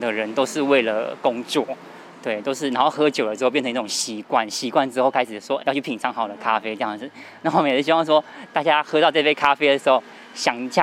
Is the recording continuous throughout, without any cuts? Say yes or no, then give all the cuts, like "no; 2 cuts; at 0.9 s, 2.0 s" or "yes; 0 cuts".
no; 1 cut; at 5.6 s